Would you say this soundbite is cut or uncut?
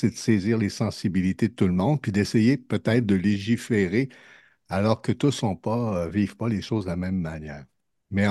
uncut